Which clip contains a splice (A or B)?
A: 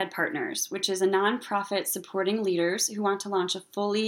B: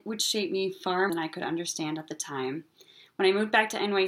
B